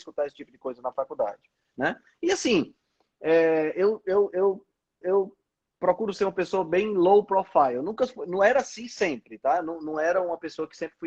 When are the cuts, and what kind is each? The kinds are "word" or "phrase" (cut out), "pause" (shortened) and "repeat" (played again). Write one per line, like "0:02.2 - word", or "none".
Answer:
0:05.0 - repeat